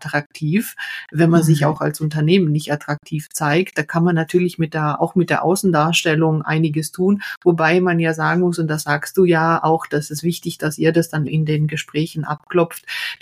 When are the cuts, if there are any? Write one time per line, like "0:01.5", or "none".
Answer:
0:11.3